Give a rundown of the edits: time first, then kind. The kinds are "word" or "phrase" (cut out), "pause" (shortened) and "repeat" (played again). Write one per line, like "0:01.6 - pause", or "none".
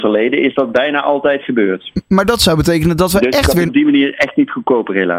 0:03.7 - phrase